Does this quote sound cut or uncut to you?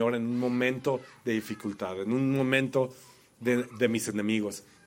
uncut